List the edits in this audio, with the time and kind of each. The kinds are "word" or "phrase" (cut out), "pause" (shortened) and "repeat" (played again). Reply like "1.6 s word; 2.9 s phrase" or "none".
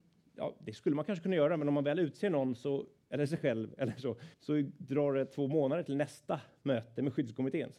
4.3 s pause